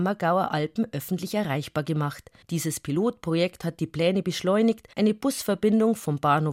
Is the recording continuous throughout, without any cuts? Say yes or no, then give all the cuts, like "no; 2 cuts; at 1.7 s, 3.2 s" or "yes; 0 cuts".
no; 2 cuts; at 2.4 s, 4.9 s